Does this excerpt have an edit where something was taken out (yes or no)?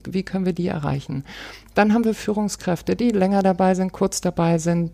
no